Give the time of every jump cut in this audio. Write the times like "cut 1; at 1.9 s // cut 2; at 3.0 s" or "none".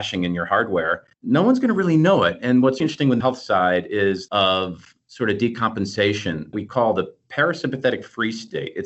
cut 1; at 1.1 s // cut 2; at 2.8 s // cut 3; at 3.2 s // cut 4; at 4.3 s // cut 5; at 6.5 s